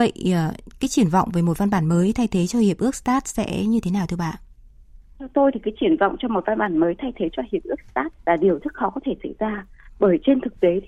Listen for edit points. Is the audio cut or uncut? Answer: cut